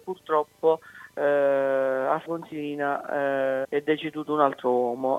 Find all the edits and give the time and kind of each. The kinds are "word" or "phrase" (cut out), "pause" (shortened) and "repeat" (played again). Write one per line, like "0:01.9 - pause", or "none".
0:02.3 - word
0:03.6 - word